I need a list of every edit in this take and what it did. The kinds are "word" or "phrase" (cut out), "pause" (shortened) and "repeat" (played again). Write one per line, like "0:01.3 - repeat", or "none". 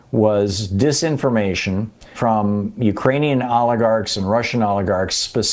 0:02.1 - word